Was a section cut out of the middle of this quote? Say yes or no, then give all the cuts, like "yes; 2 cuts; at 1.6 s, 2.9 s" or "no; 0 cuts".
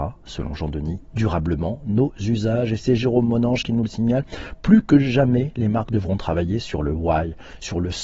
no; 0 cuts